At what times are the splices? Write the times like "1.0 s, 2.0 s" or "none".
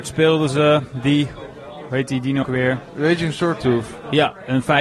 2.4 s